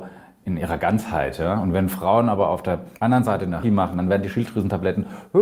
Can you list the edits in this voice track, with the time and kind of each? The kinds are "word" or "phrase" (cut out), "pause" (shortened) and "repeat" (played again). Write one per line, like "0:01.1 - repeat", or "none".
0:03.0 - pause
0:03.6 - word